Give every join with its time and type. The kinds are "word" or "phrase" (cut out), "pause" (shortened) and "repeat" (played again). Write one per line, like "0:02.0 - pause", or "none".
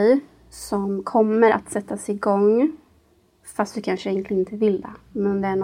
none